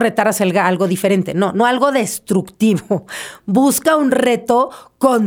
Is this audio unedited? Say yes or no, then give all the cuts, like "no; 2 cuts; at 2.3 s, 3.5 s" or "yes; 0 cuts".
yes; 0 cuts